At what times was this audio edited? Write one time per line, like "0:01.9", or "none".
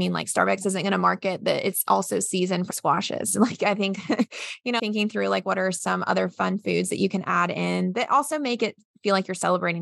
0:02.7
0:04.8